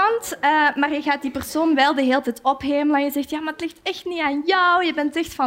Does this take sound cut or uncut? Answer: uncut